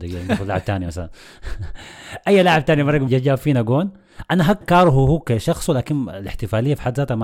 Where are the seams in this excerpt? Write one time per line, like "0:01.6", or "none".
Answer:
0:03.1
0:04.6